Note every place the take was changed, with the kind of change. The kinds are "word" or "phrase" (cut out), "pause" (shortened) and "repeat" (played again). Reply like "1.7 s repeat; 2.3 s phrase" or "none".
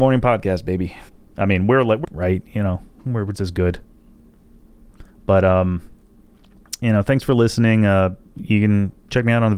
1.1 s pause; 2.0 s phrase; 3.3 s word; 5.1 s pause